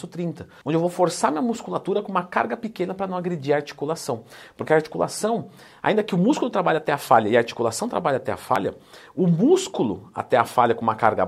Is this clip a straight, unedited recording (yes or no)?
yes